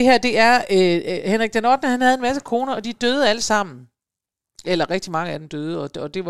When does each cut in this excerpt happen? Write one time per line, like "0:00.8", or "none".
none